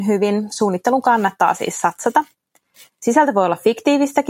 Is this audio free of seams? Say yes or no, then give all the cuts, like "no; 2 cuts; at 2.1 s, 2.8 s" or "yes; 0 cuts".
yes; 0 cuts